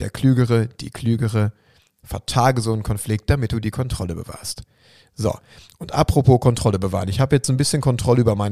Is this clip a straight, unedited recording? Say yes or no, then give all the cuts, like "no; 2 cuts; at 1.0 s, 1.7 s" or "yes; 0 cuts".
yes; 0 cuts